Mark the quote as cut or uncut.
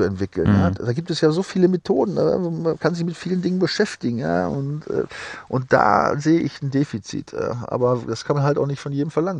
uncut